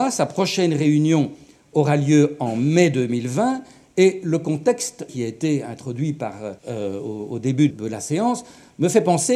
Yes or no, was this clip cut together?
yes